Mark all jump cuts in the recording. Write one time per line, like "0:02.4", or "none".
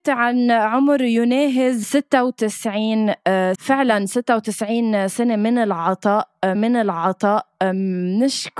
0:01.8
0:03.5
0:06.5